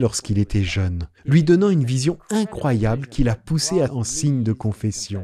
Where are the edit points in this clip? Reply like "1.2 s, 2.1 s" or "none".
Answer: 1.2 s, 3.9 s